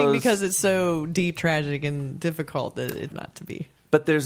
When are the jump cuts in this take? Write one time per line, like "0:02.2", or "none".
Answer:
0:01.4
0:03.1